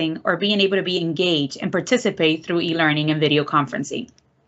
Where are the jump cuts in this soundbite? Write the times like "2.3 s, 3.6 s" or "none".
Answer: none